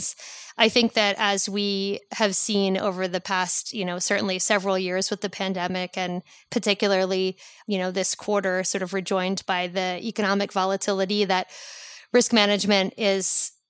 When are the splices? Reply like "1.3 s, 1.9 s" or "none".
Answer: none